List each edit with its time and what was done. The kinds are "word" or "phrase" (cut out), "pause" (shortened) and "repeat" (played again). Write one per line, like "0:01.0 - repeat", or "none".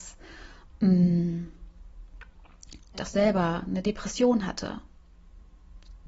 0:02.9 - word